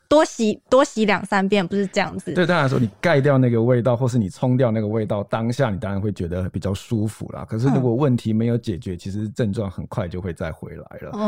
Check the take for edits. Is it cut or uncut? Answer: uncut